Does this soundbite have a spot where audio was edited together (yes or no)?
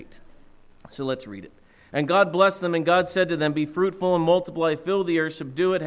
no